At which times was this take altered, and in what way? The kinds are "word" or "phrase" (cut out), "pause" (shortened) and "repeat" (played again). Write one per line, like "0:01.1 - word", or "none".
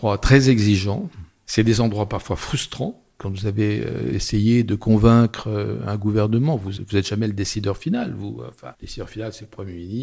0:06.8 - word
0:08.7 - word